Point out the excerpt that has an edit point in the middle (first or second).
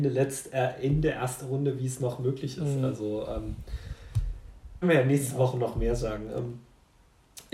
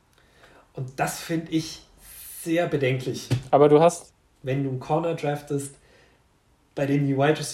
first